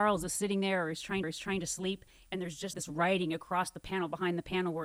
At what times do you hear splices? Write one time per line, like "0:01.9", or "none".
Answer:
0:01.2
0:02.7